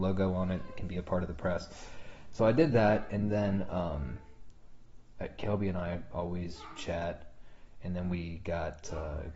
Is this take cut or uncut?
uncut